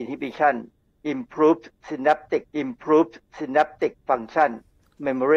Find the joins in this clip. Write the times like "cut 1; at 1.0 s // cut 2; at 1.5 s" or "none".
cut 1; at 2.5 s